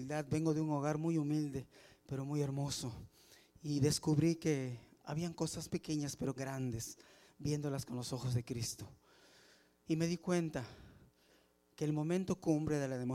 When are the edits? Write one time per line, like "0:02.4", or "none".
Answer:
0:05.7
0:06.4